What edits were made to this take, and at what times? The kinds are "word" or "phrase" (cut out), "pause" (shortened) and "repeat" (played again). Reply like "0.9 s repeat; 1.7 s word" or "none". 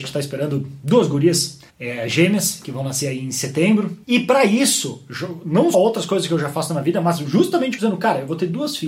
1.7 s pause; 4.0 s pause; 5.7 s word; 7.8 s phrase